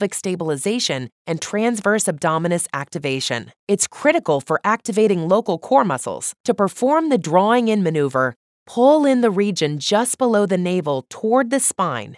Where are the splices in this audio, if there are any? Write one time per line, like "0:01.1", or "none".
0:03.6
0:06.4